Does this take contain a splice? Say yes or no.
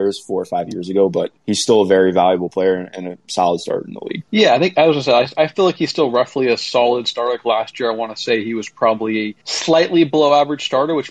yes